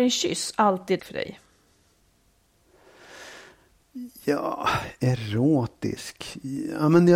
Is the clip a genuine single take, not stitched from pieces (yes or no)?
no